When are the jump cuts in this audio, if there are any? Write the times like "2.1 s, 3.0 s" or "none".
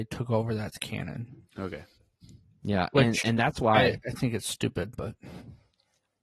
1.5 s

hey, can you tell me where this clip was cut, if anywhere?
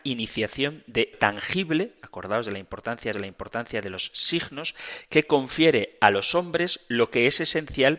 1.1 s, 3.1 s

